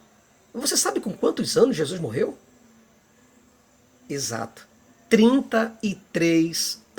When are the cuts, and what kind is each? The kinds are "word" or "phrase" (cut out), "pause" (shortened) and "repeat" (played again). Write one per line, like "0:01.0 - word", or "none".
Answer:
none